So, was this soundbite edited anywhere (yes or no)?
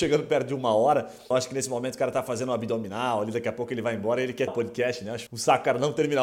yes